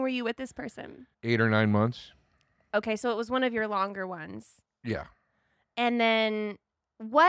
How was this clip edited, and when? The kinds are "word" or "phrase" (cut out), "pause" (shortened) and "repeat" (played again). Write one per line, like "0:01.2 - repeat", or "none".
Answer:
0:01.1 - pause